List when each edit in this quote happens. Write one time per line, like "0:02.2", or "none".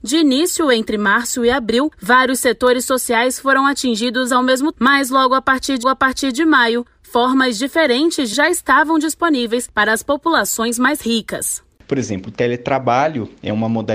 0:04.7
0:05.8
0:08.3